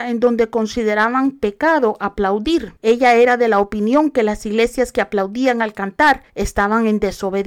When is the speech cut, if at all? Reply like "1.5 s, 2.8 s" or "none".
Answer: 2.8 s, 6.3 s